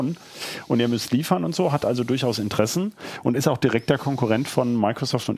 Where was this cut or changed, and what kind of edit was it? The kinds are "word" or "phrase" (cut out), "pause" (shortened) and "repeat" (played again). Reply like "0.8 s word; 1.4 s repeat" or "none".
none